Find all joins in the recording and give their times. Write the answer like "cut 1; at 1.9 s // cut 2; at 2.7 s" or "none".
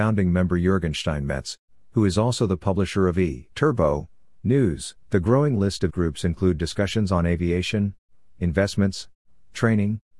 cut 1; at 3.5 s // cut 2; at 5.0 s // cut 3; at 5.9 s